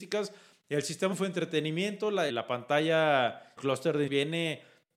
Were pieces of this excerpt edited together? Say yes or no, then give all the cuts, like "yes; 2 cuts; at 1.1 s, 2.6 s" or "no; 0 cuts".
yes; 4 cuts; at 1.1 s, 2.3 s, 3.6 s, 4.1 s